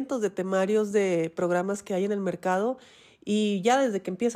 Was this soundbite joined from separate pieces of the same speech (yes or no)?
no